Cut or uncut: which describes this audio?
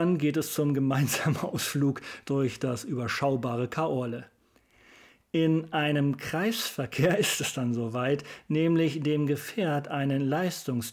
uncut